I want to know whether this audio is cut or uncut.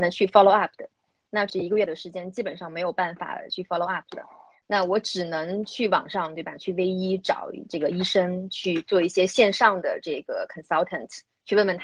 uncut